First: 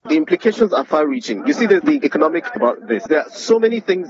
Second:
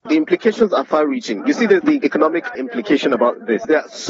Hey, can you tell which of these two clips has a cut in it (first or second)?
first